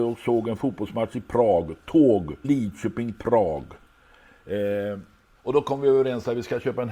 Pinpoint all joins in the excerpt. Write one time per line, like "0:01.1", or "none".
0:02.4
0:03.1